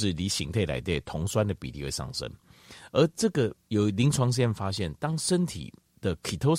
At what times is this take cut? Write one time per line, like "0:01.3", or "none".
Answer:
0:03.6

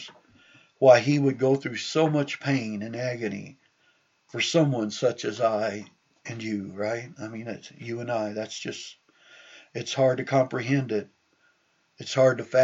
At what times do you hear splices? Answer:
none

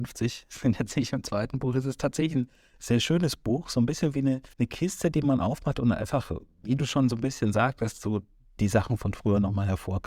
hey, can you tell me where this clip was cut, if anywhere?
0:04.5

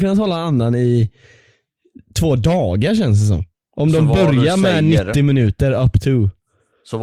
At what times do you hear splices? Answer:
none

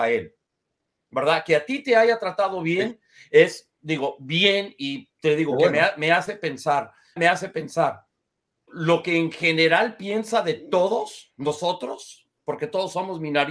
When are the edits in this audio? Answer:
0:03.8
0:07.2
0:08.7

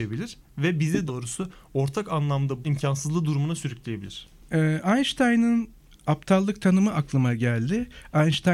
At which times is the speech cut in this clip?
0:01.1
0:02.6

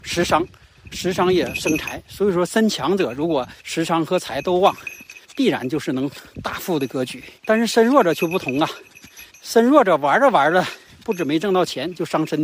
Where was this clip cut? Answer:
0:00.9
0:03.6
0:05.2
0:07.4
0:09.3

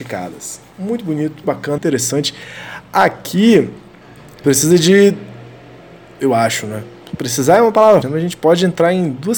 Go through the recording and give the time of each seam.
0:01.4
0:01.8
0:04.4
0:08.0

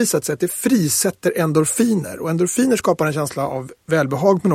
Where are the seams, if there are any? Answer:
none

